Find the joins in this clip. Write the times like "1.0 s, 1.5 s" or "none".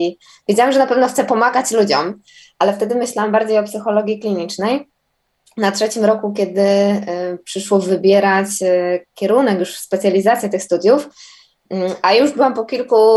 none